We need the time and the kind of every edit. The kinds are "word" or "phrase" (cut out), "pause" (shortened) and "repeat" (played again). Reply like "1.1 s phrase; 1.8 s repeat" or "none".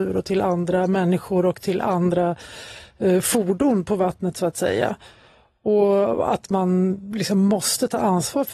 none